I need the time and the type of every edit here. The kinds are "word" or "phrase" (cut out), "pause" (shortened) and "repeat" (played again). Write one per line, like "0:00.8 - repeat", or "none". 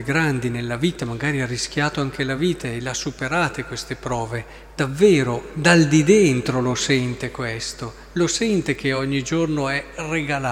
none

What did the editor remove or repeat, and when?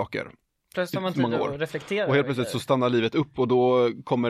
none

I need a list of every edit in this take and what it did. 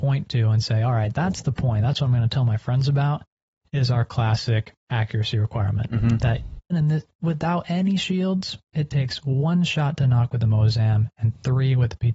0:06.7 - word

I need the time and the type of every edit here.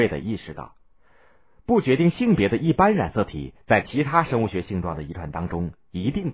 none

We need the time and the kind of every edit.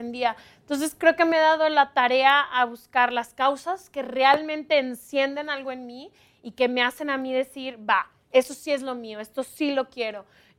none

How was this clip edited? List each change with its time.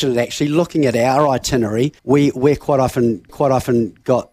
0:02.0 - pause
0:03.3 - repeat

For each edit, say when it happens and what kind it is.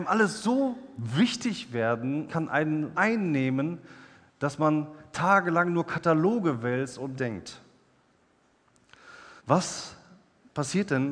0:02.3 - phrase
0:02.9 - word
0:07.2 - phrase
0:09.4 - pause

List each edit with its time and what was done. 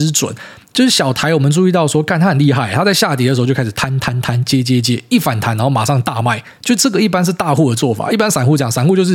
0:06.6 - pause

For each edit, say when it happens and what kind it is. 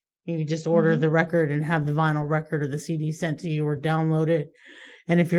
none

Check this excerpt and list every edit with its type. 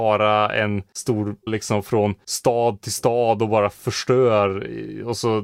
0:01.5 - phrase

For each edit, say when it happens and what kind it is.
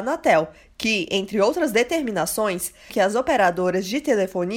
0:02.9 - word

